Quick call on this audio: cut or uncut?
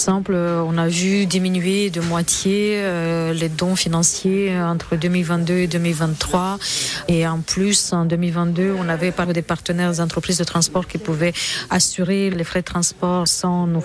cut